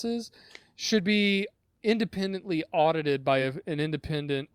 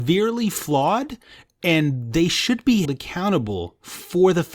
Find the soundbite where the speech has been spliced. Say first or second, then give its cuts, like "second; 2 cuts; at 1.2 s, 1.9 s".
second; 1 cut; at 2.8 s